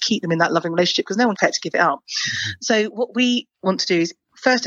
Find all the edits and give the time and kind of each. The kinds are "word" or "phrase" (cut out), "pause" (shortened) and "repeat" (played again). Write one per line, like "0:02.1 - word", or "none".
0:01.3 - word